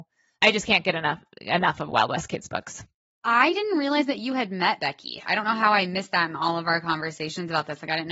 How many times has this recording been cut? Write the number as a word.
zero